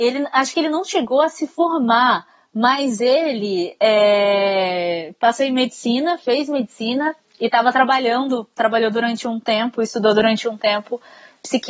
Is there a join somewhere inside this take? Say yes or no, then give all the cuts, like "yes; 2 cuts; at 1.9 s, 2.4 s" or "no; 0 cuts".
no; 0 cuts